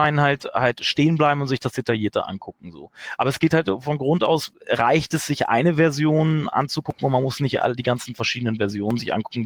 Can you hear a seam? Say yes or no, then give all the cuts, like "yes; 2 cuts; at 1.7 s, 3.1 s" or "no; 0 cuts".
no; 0 cuts